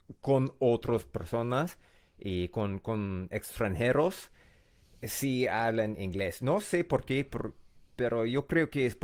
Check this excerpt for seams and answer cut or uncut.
uncut